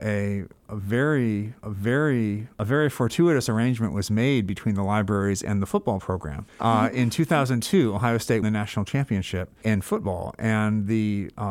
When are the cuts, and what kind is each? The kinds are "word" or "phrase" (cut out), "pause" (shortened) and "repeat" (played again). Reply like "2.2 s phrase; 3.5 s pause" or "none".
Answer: 1.6 s repeat; 6.5 s pause; 8.4 s word